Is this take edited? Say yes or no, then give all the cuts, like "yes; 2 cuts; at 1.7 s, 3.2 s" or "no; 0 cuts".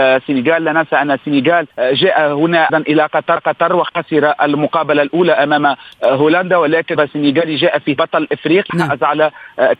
yes; 6 cuts; at 1.7 s, 2.7 s, 3.4 s, 7.0 s, 8.0 s, 8.7 s